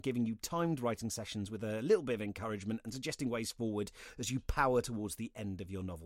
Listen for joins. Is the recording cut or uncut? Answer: uncut